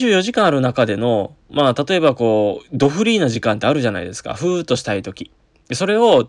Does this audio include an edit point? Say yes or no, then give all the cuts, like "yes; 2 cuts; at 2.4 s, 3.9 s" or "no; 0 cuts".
no; 0 cuts